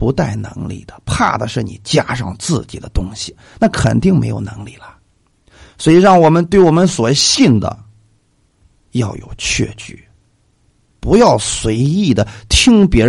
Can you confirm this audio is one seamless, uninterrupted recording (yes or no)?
yes